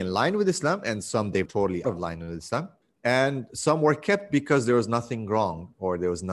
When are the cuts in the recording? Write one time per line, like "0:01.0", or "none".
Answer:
0:01.5
0:01.8
0:02.8